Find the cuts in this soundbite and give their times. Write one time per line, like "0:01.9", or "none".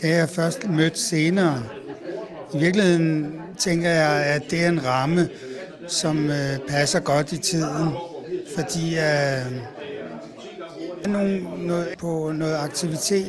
0:11.0
0:11.9